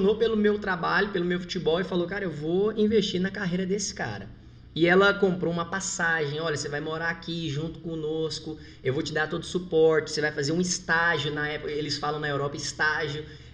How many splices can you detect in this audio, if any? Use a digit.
0